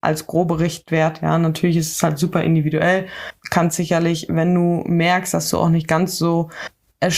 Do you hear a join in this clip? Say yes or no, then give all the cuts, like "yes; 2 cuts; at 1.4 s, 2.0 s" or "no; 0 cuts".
no; 0 cuts